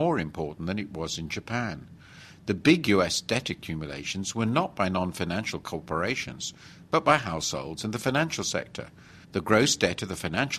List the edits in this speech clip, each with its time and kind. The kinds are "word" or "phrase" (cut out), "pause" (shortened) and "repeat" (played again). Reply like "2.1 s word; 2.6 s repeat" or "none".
9.2 s pause